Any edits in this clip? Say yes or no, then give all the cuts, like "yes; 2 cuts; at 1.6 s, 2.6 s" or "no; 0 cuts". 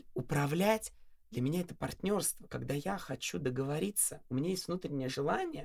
no; 0 cuts